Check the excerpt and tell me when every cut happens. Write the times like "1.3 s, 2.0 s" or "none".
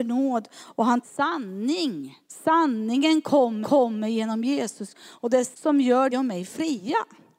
1.0 s, 2.2 s, 3.6 s, 4.9 s, 5.5 s, 6.1 s